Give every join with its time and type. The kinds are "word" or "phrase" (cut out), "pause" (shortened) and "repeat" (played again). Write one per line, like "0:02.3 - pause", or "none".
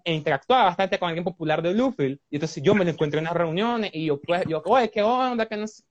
none

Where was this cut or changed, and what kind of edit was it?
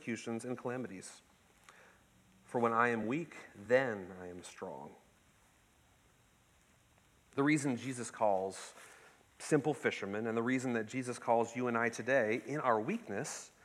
none

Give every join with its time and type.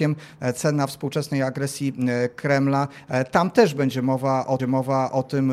0:04.6 - repeat

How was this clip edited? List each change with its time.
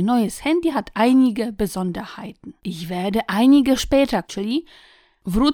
0:02.6 - pause
0:03.8 - word
0:04.2 - word

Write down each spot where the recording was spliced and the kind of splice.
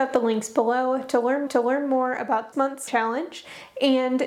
0:01.5 - repeat
0:02.5 - word
0:02.9 - word

